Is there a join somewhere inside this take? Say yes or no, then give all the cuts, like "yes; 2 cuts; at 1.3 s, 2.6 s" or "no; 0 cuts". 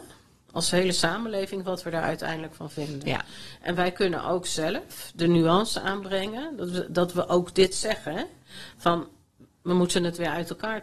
no; 0 cuts